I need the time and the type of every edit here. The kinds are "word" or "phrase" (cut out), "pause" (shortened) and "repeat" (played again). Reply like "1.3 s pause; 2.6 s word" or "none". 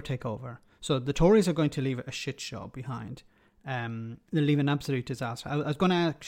none